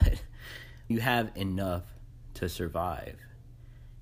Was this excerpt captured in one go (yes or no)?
no